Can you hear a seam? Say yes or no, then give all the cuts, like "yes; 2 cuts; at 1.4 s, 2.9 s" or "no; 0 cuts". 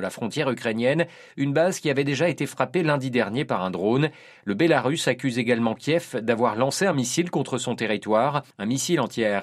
no; 0 cuts